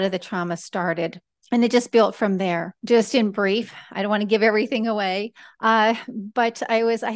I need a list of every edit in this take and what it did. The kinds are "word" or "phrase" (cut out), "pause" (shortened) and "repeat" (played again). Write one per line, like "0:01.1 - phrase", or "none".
0:01.4 - pause
0:02.8 - pause